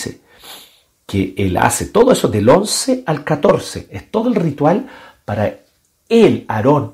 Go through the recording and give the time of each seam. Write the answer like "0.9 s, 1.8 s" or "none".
none